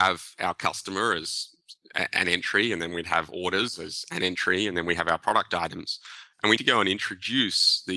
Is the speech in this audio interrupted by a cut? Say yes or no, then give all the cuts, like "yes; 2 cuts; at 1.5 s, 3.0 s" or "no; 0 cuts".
yes; 1 cut; at 6.6 s